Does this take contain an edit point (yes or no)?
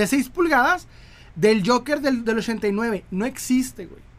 no